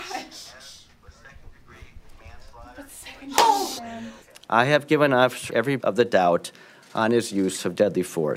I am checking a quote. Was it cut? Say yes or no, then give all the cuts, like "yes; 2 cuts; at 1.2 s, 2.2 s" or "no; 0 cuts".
yes; 4 cuts; at 3.8 s, 4.2 s, 5.5 s, 5.8 s